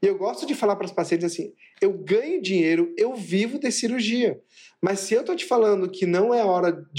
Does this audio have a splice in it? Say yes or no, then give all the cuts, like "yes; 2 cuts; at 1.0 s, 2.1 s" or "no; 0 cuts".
no; 0 cuts